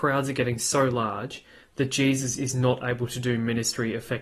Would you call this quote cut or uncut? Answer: uncut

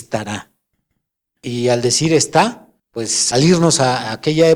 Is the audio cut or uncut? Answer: cut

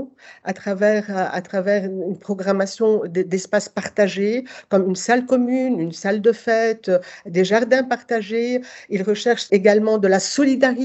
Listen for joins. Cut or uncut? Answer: uncut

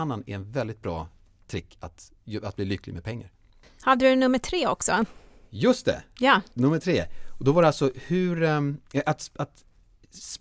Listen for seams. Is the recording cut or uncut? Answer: uncut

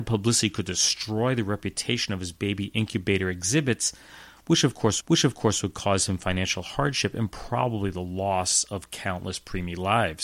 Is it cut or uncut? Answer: cut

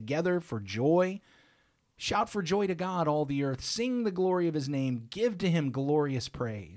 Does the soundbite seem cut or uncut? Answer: uncut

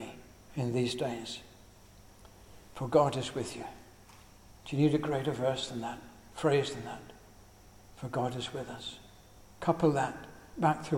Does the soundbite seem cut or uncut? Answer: uncut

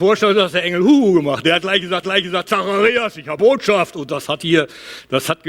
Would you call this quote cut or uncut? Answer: cut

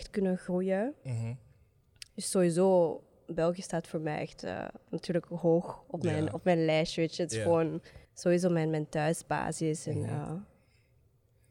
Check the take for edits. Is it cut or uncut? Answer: cut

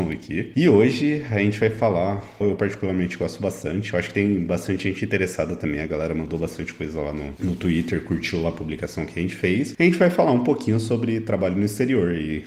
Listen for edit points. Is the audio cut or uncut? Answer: cut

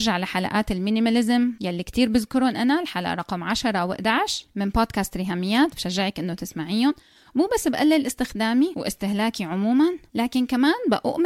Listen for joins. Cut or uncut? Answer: uncut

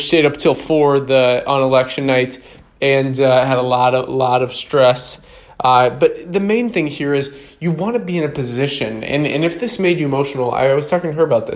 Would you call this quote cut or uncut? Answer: uncut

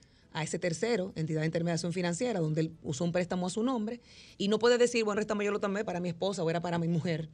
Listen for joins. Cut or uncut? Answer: cut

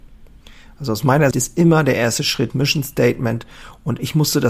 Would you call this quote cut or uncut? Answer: cut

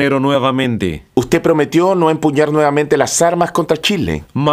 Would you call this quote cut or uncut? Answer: cut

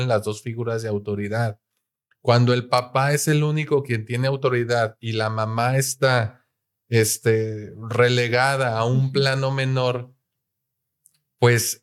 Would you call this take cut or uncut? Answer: uncut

